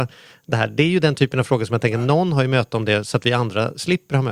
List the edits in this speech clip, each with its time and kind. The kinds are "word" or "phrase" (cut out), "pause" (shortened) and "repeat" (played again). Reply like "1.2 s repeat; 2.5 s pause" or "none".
none